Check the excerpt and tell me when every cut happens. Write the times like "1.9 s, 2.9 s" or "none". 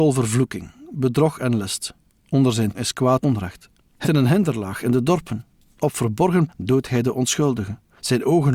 2.7 s, 3.2 s, 4.0 s, 6.5 s